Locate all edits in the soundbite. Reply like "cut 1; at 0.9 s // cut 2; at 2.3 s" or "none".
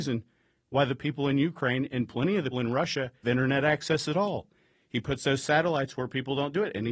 cut 1; at 2.5 s // cut 2; at 3.2 s